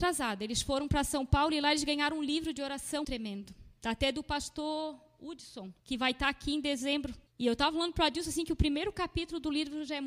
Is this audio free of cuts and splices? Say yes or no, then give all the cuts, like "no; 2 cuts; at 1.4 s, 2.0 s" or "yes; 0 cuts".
no; 3 cuts; at 3.0 s, 5.8 s, 7.3 s